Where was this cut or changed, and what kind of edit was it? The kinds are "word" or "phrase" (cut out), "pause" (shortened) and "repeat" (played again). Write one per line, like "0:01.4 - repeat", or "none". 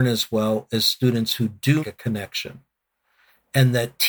0:01.8 - word